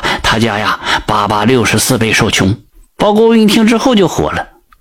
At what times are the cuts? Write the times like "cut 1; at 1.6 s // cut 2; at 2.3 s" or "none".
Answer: cut 1; at 2.7 s